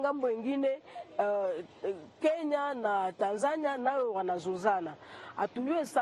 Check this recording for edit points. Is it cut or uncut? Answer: uncut